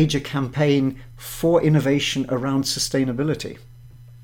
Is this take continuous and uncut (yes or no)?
yes